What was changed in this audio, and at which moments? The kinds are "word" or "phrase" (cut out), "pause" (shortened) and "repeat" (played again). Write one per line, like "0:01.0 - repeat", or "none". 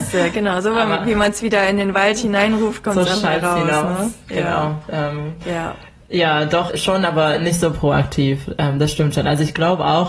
0:06.7 - word